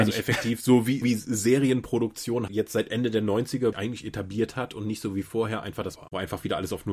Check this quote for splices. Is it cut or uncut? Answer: cut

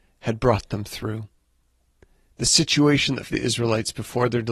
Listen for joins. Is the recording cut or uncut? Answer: cut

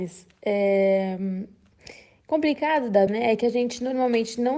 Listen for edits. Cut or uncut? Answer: cut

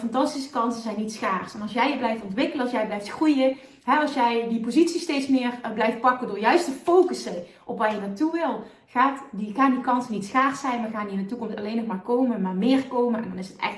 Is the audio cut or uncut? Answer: uncut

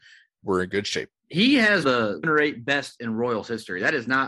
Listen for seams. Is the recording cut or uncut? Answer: cut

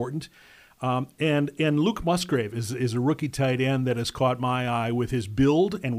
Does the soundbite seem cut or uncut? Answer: uncut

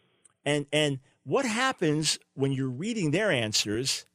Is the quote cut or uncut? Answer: cut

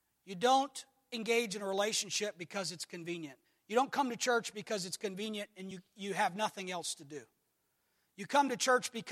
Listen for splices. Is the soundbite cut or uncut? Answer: uncut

